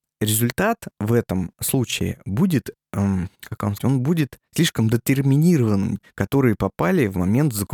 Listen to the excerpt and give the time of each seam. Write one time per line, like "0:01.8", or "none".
0:03.3
0:03.8
0:04.5
0:06.0